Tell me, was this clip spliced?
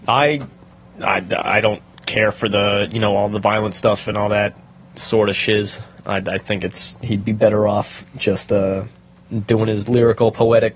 no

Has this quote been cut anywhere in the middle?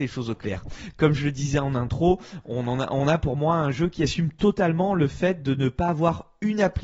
no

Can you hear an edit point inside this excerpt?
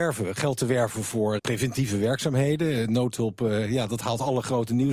yes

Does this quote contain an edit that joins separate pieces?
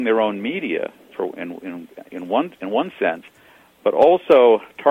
no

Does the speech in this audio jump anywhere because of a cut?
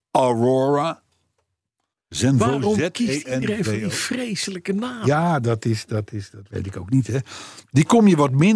no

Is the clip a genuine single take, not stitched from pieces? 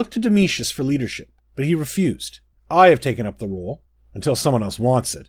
yes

